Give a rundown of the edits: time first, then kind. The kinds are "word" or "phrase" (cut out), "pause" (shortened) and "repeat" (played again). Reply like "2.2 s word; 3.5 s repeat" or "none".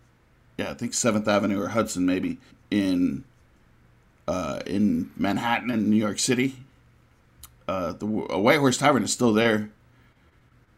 2.5 s pause